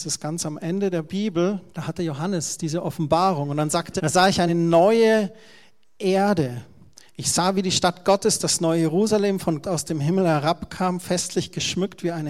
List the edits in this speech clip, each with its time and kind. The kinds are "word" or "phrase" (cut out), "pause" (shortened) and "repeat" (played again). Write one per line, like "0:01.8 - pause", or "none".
0:01.7 - pause
0:04.0 - word
0:04.5 - phrase
0:09.6 - word